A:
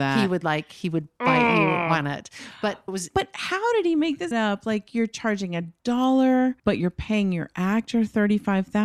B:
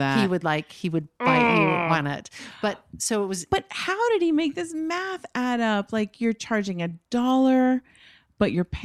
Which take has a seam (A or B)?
A